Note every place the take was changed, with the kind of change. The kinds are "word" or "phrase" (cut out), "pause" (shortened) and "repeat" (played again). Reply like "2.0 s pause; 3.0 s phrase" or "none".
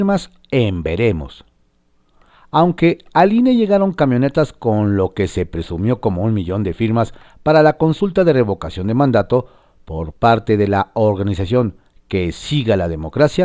none

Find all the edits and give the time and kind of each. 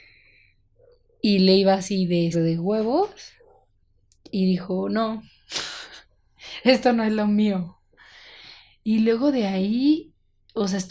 2.3 s word

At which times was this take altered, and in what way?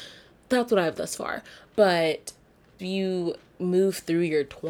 0.9 s word; 2.8 s word

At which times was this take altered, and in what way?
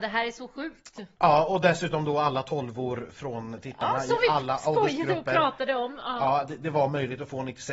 none

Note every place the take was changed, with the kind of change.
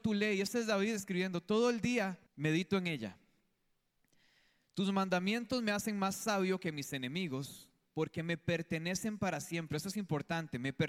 2.3 s pause

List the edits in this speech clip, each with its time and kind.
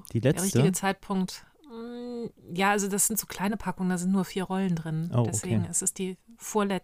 none

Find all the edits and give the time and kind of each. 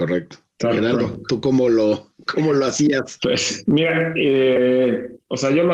none

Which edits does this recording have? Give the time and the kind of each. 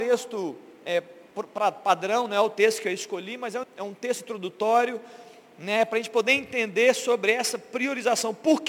3.6 s word

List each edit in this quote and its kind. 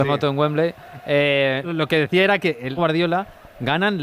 1.6 s word; 2.8 s phrase

